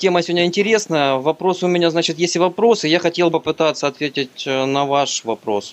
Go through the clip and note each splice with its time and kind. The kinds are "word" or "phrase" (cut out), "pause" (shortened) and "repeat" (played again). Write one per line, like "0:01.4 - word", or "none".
0:03.3 - word